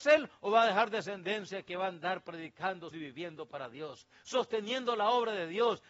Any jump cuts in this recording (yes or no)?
yes